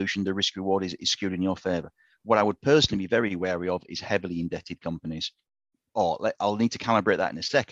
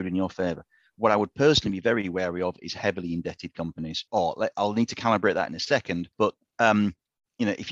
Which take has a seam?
second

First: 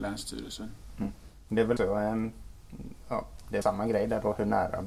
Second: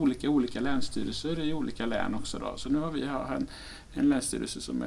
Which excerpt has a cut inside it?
first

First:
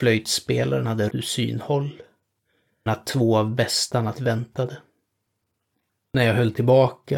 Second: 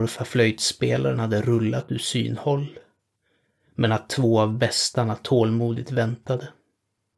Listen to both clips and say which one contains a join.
first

